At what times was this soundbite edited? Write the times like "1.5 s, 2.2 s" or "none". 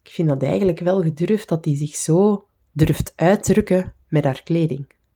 none